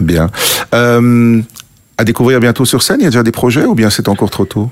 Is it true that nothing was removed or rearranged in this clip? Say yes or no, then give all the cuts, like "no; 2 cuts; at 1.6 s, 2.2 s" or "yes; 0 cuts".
yes; 0 cuts